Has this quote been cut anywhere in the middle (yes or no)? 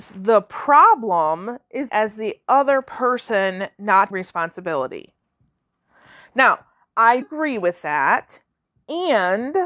yes